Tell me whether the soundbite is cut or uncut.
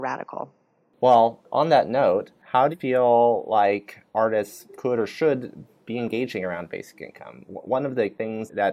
cut